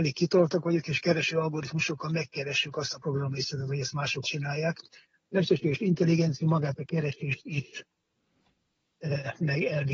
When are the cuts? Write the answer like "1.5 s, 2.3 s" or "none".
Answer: 4.2 s